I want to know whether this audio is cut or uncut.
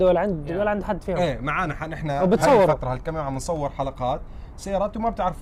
uncut